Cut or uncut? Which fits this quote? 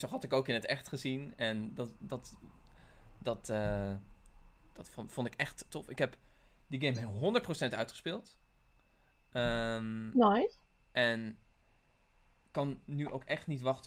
cut